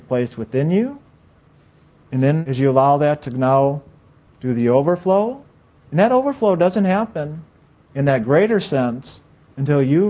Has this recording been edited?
no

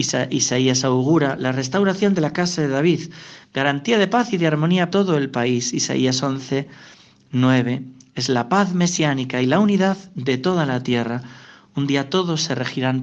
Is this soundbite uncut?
no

